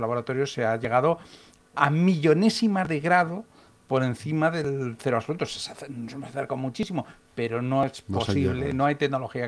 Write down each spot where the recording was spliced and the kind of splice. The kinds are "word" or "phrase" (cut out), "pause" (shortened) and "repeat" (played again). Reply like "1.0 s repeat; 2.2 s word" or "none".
none